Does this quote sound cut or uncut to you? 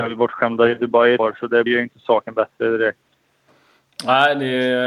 cut